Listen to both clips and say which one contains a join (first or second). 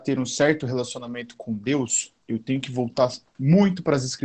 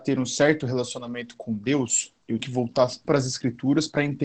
second